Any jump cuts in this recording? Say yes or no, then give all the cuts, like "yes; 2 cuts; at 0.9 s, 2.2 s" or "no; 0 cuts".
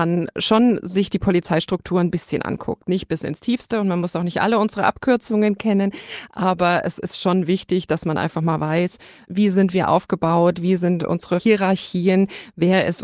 no; 0 cuts